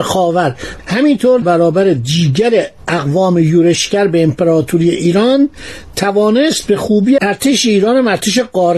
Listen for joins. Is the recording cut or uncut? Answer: cut